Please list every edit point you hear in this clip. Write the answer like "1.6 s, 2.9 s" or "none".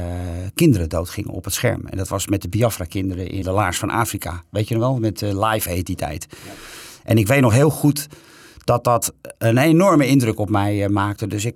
3.4 s